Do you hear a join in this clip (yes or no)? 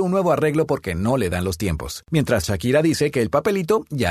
no